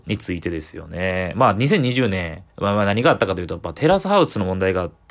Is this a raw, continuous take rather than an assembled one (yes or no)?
no